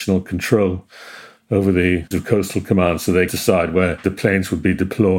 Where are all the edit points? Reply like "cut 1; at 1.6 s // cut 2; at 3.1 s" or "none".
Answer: cut 1; at 2.1 s // cut 2; at 3.3 s